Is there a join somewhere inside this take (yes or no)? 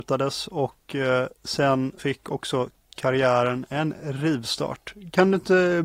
yes